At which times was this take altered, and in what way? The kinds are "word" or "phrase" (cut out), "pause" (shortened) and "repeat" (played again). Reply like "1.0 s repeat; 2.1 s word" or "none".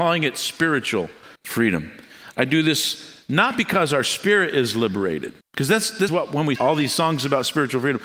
1.4 s pause; 5.4 s pause; 6.1 s word; 6.6 s word